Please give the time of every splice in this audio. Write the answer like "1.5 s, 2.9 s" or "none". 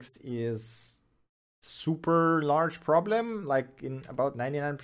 none